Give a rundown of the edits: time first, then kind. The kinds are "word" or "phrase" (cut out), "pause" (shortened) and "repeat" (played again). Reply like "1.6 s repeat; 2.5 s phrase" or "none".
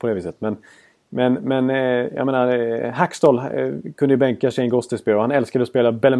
none